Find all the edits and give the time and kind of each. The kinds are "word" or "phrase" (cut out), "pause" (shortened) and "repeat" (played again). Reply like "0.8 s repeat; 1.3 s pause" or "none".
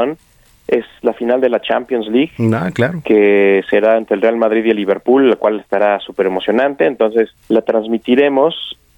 7.4 s pause